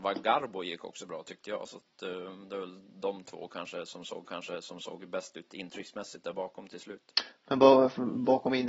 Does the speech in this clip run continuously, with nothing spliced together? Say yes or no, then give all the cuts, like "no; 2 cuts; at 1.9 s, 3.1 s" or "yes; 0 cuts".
no; 1 cut; at 4.2 s